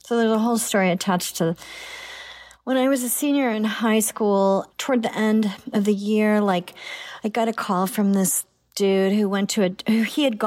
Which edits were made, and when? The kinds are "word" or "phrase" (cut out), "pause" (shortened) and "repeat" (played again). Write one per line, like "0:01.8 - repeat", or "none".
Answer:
none

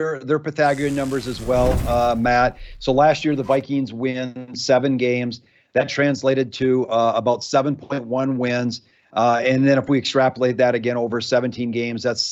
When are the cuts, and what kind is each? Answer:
none

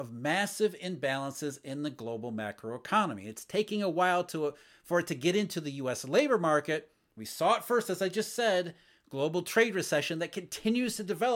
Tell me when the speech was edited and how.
none

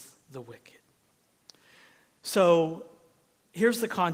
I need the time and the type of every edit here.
none

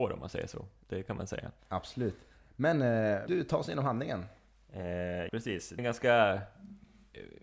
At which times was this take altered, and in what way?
0:03.3 - word
0:05.3 - word
0:05.8 - word

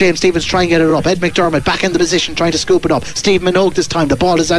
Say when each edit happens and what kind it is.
none

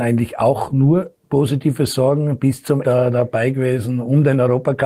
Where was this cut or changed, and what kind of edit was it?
0:02.8 - word

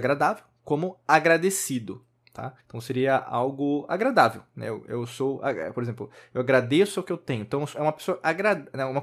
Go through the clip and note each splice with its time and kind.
0:02.6 - pause

